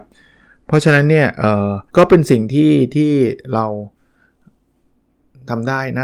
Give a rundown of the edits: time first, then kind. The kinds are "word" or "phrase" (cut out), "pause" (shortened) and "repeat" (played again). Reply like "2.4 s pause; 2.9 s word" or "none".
1.9 s pause